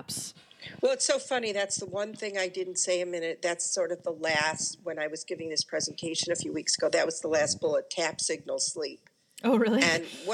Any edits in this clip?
no; 0 cuts

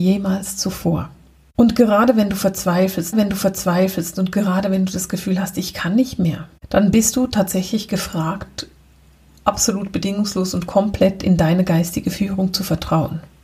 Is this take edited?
yes; 1 cut; at 3.1 s

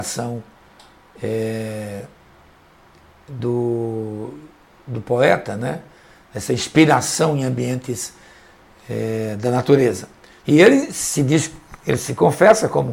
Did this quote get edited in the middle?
no; 0 cuts

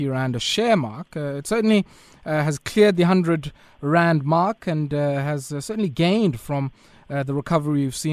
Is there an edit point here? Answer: no; 0 cuts

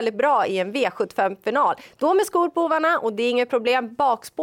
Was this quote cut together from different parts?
no; 0 cuts

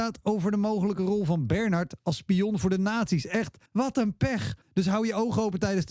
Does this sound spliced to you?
yes; 2 cuts; at 3.7 s, 4.6 s

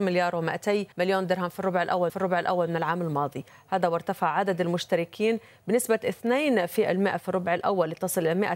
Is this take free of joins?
no; 2 cuts; at 0.9 s, 2.1 s

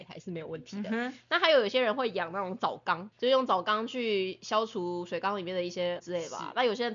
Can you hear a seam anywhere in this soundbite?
yes; 2 cuts; at 3.1 s, 6.0 s

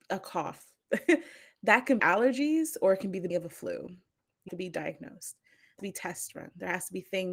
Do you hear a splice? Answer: yes; 4 cuts; at 2.0 s, 3.3 s, 4.5 s, 5.8 s

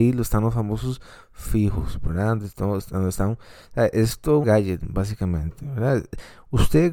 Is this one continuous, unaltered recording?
no; 1 cut; at 4.4 s

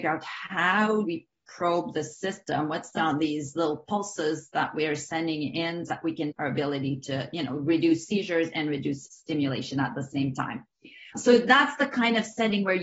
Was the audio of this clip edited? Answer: yes; 5 cuts; at 1.0 s, 3.0 s, 5.9 s, 6.3 s, 11.1 s

